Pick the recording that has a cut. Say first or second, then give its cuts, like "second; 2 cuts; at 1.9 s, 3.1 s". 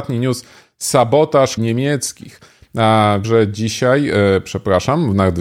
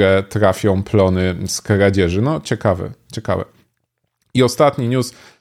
first; 2 cuts; at 1.6 s, 3.2 s